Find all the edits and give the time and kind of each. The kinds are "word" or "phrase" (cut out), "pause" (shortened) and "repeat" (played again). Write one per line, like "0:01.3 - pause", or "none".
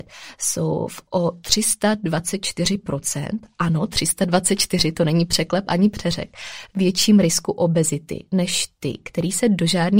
none